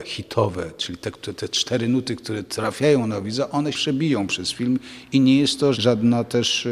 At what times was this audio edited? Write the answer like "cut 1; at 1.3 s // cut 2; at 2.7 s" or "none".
cut 1; at 3.7 s // cut 2; at 5.7 s